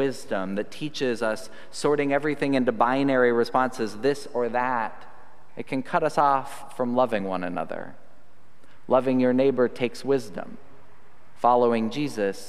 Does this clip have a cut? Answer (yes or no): no